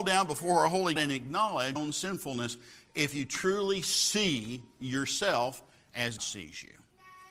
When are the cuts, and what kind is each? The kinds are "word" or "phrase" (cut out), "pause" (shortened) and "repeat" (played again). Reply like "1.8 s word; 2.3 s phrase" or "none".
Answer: 1.0 s word; 1.8 s word; 6.2 s word